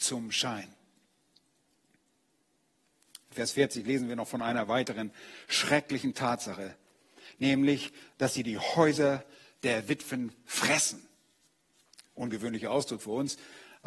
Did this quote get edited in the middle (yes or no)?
no